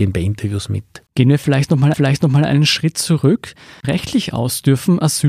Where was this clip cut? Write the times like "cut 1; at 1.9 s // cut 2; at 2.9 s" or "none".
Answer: cut 1; at 1.1 s // cut 2; at 1.9 s // cut 3; at 3.8 s